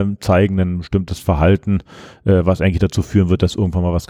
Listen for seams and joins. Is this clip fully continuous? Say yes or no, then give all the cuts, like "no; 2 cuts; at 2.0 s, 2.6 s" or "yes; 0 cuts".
yes; 0 cuts